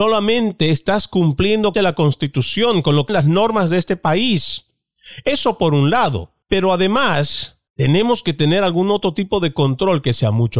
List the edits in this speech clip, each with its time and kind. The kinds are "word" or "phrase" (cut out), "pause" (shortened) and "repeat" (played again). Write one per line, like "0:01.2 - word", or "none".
0:01.7 - phrase
0:03.1 - word
0:06.4 - pause
0:07.7 - pause